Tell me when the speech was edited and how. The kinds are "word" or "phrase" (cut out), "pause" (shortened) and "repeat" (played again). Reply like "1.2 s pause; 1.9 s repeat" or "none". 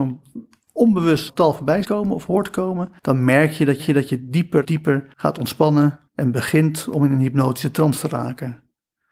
1.3 s word; 1.8 s word; 3.0 s pause; 3.8 s repeat; 4.6 s word; 5.1 s pause; 6.1 s pause